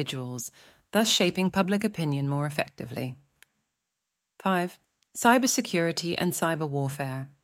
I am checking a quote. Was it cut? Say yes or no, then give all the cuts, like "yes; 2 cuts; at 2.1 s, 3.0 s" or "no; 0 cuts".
no; 0 cuts